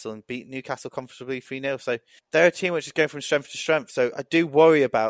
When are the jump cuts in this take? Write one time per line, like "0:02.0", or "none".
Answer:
0:02.2